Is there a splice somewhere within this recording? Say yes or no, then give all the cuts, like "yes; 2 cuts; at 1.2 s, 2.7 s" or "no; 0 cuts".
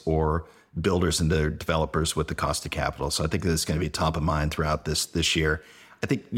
no; 0 cuts